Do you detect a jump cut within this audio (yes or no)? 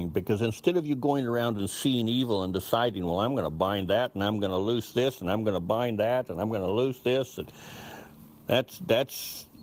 no